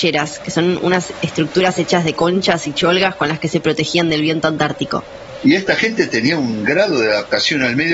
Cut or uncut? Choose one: uncut